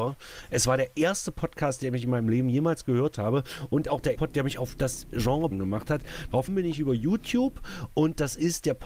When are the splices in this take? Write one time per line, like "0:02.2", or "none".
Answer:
0:04.1
0:05.5
0:06.5